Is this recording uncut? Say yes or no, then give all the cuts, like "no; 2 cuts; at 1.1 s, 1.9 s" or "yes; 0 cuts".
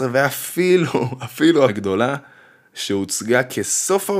no; 1 cut; at 1.7 s